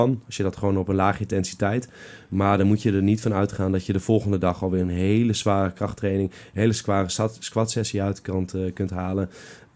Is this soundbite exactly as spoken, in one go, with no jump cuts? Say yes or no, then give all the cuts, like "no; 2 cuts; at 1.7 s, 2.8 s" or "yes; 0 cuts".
yes; 0 cuts